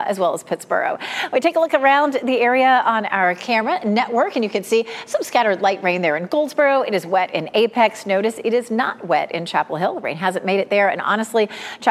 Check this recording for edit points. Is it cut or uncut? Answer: uncut